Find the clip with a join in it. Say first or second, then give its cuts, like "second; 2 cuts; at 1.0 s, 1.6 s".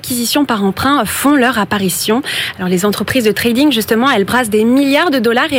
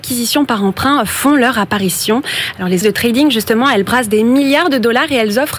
second; 1 cut; at 2.8 s